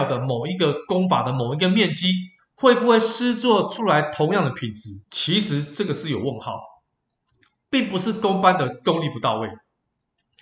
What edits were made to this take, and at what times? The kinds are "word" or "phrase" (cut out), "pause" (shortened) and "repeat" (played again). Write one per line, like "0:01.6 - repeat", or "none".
0:02.4 - pause
0:05.0 - pause